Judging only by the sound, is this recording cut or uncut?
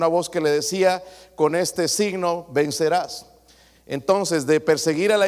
uncut